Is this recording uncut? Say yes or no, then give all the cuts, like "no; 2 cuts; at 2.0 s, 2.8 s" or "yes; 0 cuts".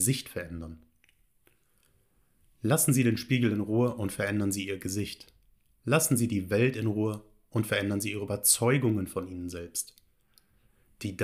yes; 0 cuts